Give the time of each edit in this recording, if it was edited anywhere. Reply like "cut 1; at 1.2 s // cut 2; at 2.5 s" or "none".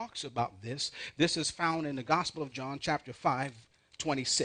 none